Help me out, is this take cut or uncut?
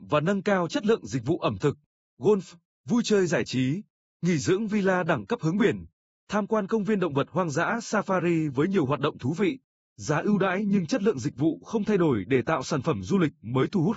uncut